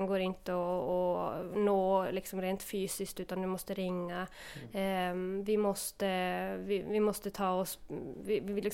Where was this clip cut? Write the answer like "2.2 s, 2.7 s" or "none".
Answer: none

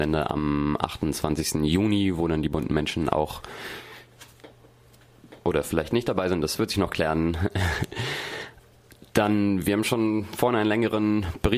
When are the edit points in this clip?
none

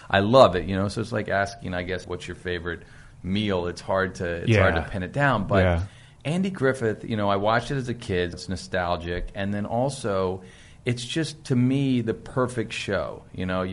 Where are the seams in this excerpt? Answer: 2.0 s, 8.3 s

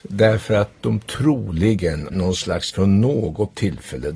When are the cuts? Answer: 2.1 s, 2.7 s

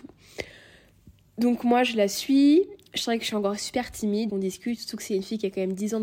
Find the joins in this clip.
4.3 s

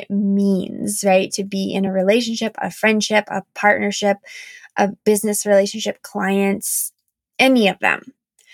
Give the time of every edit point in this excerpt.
none

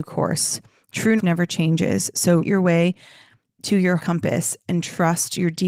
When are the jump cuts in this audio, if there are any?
1.2 s, 2.4 s, 4.0 s

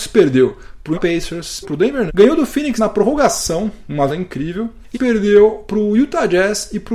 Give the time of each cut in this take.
0.9 s, 1.6 s, 2.1 s, 2.8 s, 4.1 s, 4.9 s

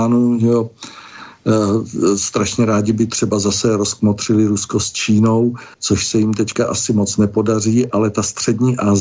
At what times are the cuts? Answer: 5.7 s

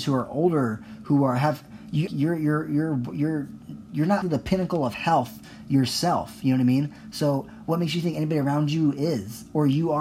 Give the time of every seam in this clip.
2.1 s, 4.2 s

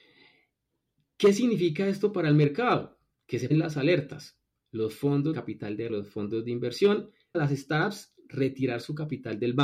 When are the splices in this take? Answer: 3.5 s, 5.3 s, 5.9 s, 7.3 s

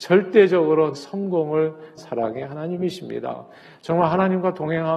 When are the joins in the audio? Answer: 0.9 s, 2.0 s

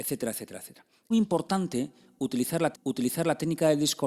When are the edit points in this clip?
1.1 s, 2.7 s

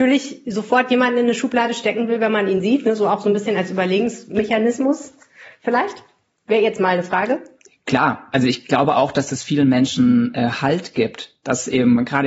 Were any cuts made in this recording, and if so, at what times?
none

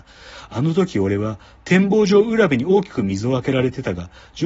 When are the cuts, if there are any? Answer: none

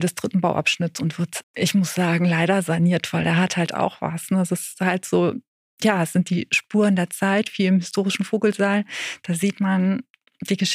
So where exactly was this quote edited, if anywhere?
1.4 s

